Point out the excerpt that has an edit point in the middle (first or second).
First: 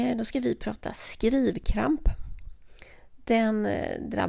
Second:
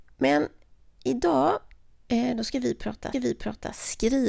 second